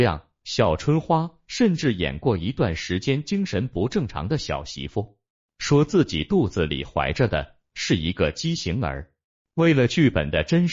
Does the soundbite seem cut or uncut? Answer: uncut